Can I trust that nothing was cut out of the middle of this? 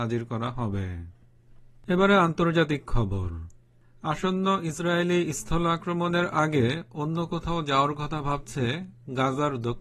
yes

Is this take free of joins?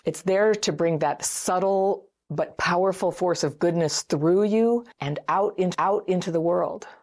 no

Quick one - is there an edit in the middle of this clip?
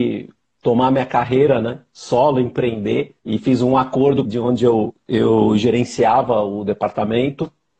yes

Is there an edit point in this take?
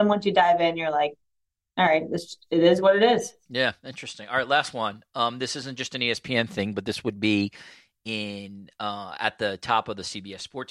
no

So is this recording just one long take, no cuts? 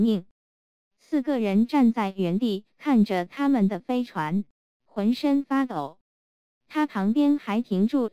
yes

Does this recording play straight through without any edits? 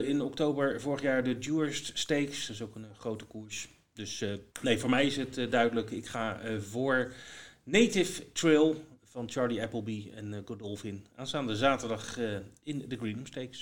no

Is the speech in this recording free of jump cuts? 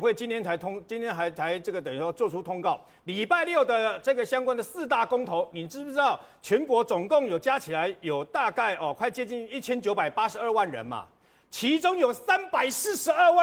yes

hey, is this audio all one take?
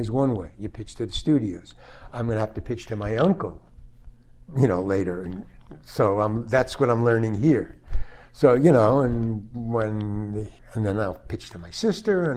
no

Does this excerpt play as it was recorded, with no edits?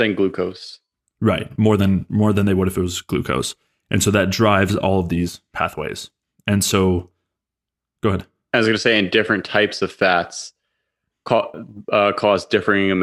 yes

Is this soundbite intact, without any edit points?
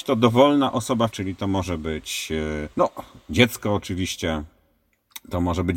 no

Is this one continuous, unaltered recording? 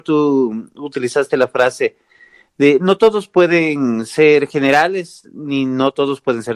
yes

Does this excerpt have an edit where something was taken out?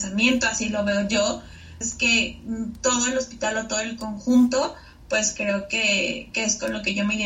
yes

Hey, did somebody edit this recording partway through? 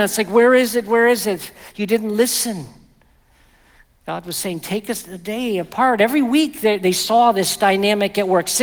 no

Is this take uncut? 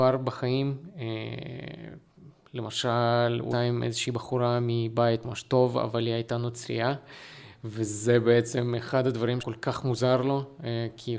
no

